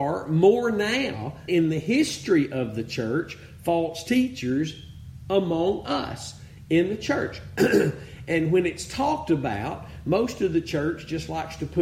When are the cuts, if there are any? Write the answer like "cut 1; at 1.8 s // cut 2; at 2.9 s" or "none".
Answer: cut 1; at 1.5 s